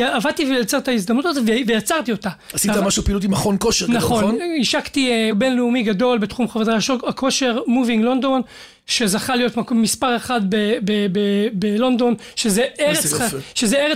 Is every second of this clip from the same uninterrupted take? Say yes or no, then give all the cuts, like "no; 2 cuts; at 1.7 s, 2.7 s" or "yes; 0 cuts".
no; 1 cut; at 5.3 s